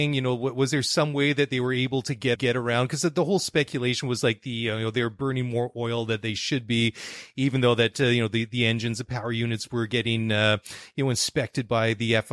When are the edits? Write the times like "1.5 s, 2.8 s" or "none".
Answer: 2.4 s